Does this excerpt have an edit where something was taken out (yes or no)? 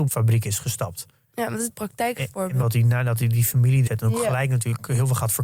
yes